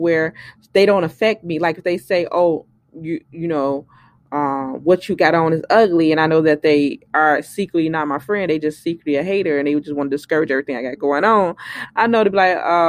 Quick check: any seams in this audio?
no; 0 cuts

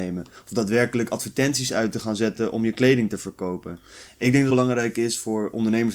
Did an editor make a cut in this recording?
yes; 1 cut; at 4.5 s

